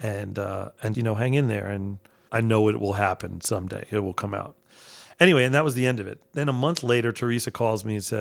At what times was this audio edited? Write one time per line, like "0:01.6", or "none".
0:00.9